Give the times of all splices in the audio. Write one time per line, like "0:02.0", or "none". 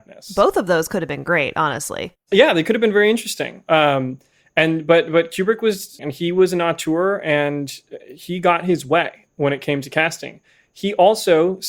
0:06.0

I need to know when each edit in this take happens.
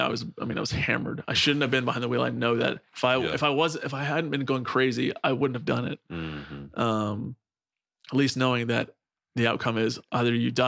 none

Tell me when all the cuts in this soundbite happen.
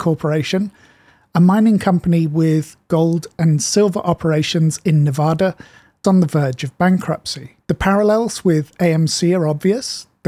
0:06.0
0:07.6

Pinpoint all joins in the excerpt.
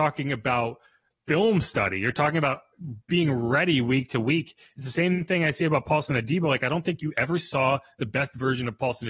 none

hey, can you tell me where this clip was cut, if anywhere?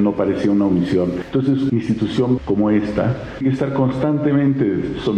0:01.7
0:02.4
0:03.4

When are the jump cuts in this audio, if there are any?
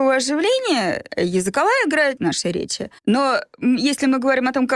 0:01.1
0:02.2
0:03.0

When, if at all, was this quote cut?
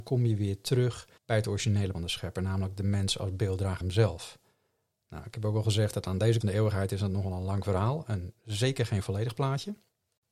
0:01.2
0:01.9
0:03.8
0:06.4

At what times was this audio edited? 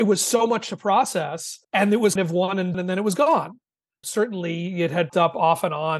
0:01.6
0:02.2
0:02.7
0:04.0
0:05.1

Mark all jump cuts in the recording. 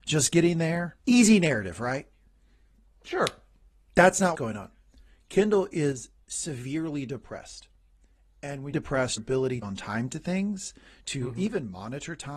0:01.0
0:04.3
0:06.2
0:08.7
0:09.2
0:09.6

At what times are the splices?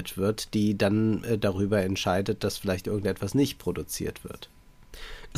none

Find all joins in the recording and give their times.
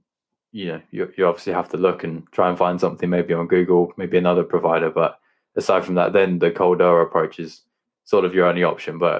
none

